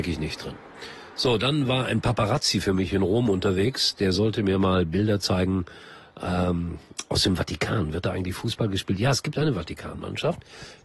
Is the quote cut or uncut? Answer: uncut